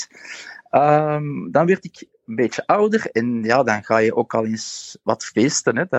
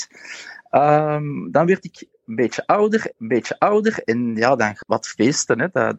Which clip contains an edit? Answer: second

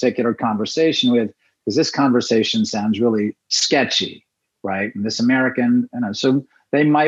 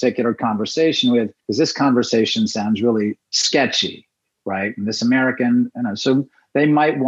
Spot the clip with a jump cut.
second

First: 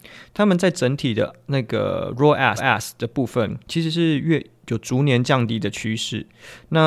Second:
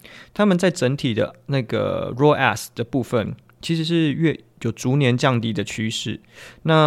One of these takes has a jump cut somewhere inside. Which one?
first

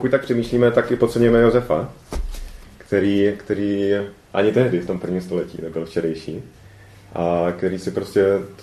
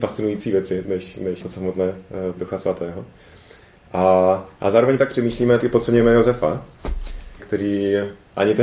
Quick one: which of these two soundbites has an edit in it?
second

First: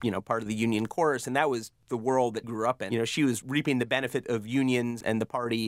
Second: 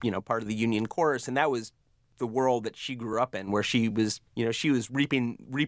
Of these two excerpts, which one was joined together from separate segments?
first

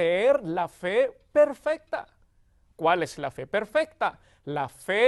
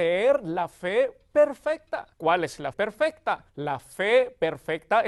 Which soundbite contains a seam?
second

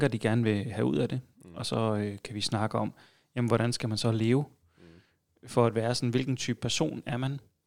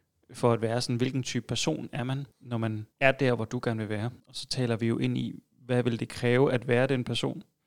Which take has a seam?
second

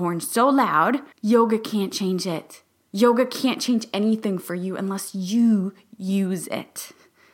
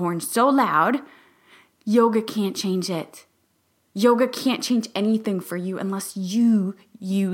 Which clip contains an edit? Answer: first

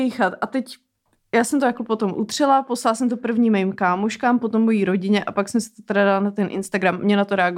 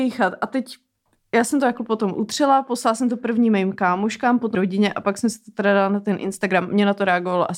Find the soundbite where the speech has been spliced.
second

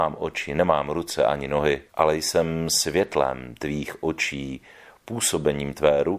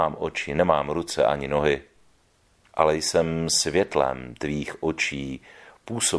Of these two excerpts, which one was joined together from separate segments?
first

